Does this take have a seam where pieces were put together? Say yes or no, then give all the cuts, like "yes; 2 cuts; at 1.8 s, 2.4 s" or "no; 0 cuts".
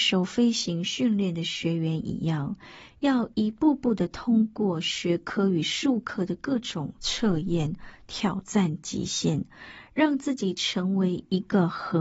no; 0 cuts